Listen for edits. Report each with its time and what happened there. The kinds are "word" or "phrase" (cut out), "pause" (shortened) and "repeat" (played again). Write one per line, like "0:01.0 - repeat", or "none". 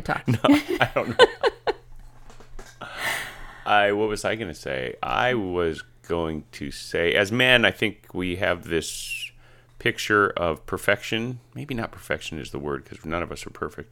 none